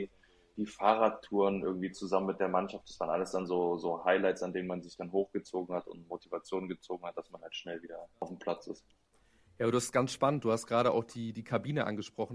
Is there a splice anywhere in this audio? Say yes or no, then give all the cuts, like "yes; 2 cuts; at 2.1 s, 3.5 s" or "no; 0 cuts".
no; 0 cuts